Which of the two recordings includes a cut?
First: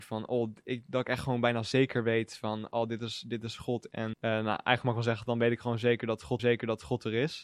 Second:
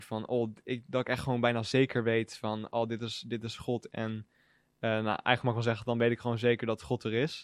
first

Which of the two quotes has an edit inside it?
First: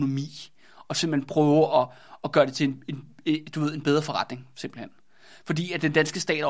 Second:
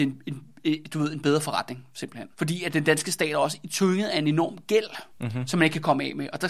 second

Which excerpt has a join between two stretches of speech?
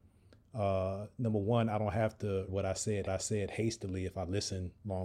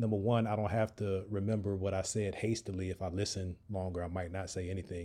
first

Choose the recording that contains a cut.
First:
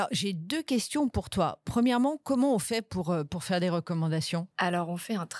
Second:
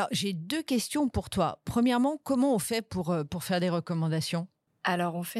first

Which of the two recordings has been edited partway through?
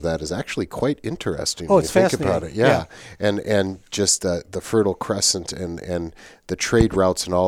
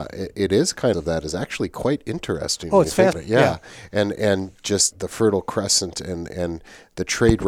second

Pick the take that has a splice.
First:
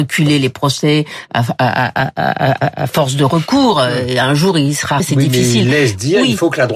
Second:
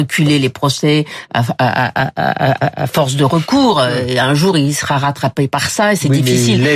first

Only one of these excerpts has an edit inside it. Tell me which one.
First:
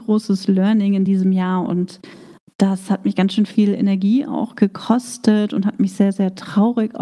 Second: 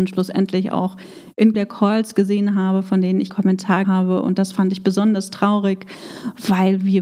second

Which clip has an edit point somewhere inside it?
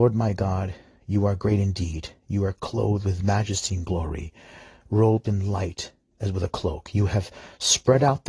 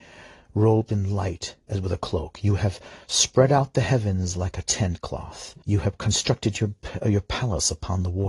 second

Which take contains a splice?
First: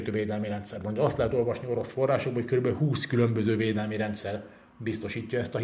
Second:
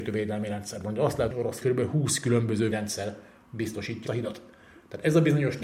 second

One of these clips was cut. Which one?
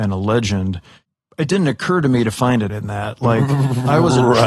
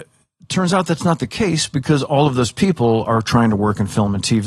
first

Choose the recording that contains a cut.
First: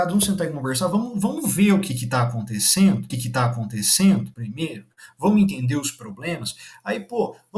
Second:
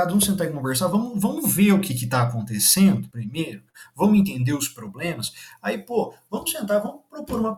first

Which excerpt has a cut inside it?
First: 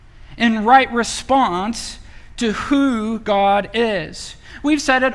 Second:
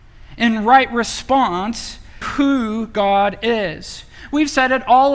second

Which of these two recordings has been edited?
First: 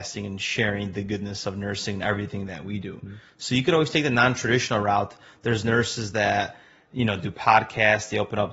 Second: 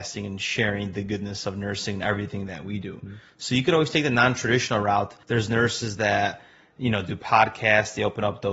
second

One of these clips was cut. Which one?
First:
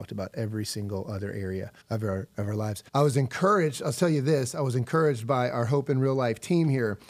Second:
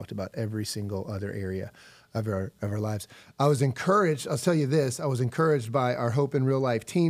first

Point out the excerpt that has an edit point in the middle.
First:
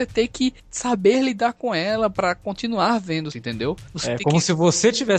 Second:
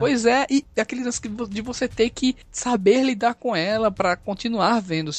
first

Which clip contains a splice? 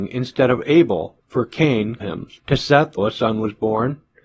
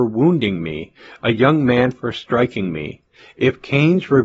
first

